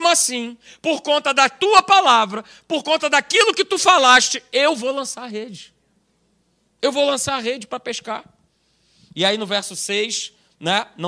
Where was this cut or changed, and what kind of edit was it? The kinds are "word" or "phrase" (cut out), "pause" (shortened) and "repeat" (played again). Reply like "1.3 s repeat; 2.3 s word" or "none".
none

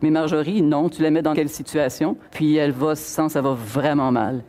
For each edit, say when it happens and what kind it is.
1.3 s word; 2.3 s pause; 3.3 s phrase

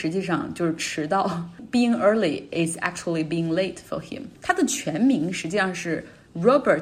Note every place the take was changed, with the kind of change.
4.3 s pause

